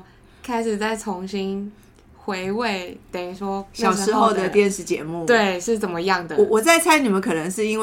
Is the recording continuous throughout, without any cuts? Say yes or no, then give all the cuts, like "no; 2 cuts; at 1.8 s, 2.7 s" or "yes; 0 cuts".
yes; 0 cuts